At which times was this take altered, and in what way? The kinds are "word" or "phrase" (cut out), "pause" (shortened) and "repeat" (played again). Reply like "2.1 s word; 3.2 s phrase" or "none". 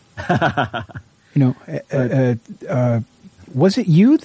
none